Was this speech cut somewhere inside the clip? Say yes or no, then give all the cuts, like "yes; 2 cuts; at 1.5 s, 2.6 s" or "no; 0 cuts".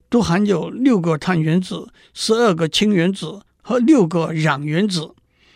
no; 0 cuts